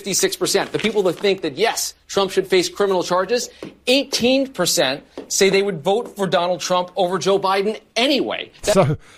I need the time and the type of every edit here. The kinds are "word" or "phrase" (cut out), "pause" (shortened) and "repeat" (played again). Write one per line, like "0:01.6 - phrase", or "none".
none